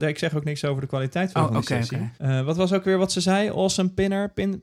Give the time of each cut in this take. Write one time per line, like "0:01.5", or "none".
0:02.1